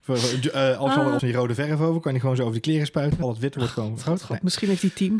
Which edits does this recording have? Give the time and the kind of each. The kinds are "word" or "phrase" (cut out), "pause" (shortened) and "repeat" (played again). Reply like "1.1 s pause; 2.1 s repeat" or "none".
1.2 s phrase; 3.2 s phrase